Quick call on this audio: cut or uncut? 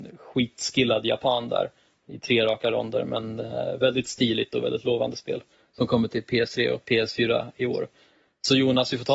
uncut